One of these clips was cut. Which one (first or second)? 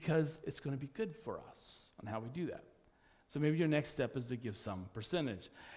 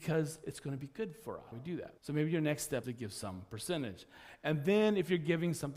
second